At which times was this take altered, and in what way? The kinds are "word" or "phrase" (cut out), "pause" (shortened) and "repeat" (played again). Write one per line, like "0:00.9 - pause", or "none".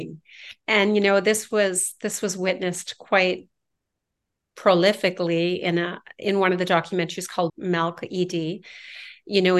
0:07.5 - word